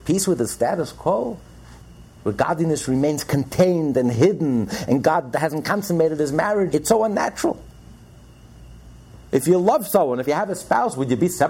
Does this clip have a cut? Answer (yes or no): yes